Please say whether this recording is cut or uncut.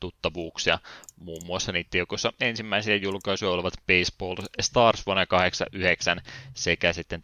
uncut